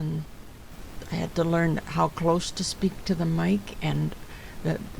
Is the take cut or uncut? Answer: uncut